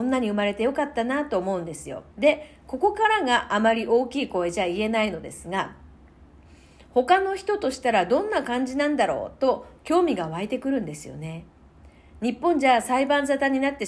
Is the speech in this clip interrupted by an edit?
yes; 1 cut; at 2.1 s

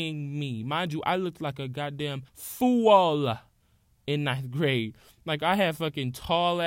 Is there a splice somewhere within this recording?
yes; 1 cut; at 2.3 s

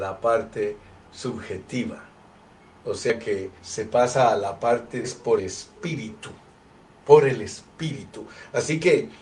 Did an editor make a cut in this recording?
yes; 3 cuts; at 3.6 s, 5.0 s, 5.4 s

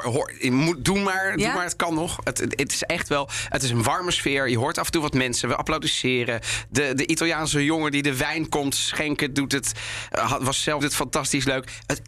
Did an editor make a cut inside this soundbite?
yes; 1 cut; at 10.8 s

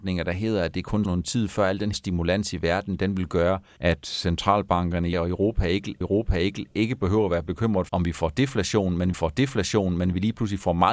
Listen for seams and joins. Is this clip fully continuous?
no; 7 cuts; at 1.0 s, 1.9 s, 3.8 s, 5.1 s, 6.0 s, 7.9 s, 9.1 s

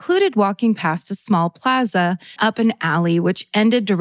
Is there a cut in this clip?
yes; 1 cut; at 2.4 s

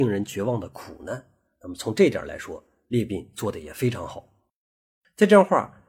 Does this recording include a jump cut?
no; 0 cuts

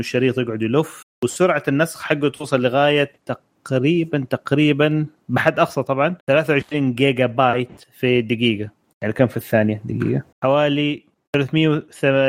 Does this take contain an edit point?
yes; 3 cuts; at 3.2 s, 6.2 s, 10.3 s

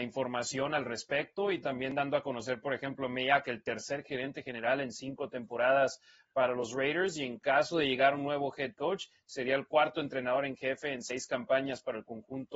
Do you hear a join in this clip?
no; 0 cuts

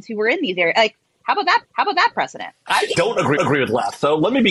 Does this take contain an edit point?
yes; 3 cuts; at 1.6 s, 2.9 s, 3.4 s

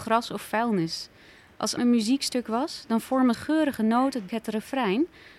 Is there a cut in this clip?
yes; 3 cuts; at 1.8 s, 3.3 s, 4.3 s

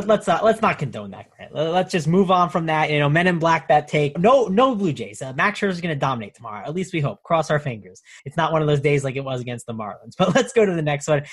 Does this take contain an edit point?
yes; 2 cuts; at 4.1 s, 8.2 s

